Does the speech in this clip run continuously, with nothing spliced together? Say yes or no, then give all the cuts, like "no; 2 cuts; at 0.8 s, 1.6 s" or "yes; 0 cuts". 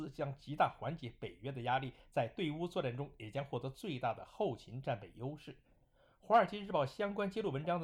yes; 0 cuts